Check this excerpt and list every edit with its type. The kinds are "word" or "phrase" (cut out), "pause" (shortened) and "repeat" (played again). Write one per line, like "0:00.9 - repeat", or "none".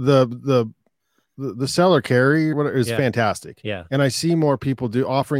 0:02.5 - word